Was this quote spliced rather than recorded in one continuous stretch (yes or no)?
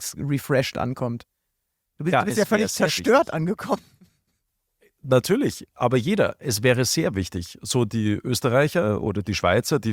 no